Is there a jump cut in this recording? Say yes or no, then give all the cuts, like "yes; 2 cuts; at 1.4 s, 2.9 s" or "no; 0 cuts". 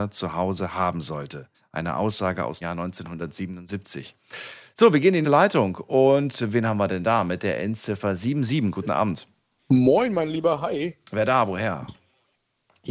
yes; 4 cuts; at 1.5 s, 2.6 s, 5.2 s, 9.6 s